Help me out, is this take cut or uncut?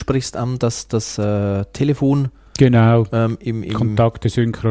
uncut